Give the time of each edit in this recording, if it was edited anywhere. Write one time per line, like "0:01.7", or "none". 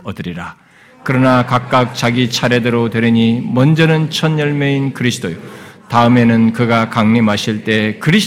none